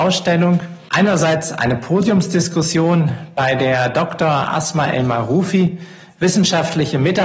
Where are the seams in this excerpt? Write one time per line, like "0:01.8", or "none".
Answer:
none